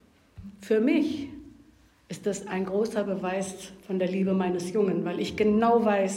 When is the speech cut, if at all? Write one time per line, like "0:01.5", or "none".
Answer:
none